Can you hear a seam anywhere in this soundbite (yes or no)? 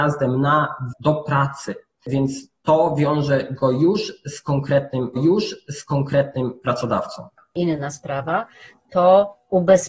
yes